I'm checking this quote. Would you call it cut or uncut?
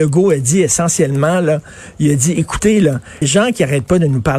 cut